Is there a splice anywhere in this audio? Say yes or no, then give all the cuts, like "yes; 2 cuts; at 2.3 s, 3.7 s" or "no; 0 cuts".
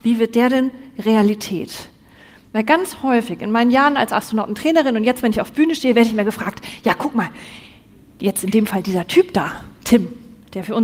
no; 0 cuts